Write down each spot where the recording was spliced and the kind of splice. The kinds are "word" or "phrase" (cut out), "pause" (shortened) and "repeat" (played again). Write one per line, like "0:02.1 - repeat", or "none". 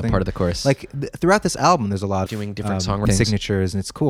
0:02.3 - phrase
0:03.0 - word